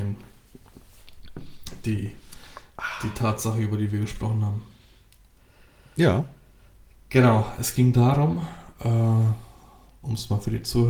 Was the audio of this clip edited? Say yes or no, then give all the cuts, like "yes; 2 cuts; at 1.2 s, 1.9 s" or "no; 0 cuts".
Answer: no; 0 cuts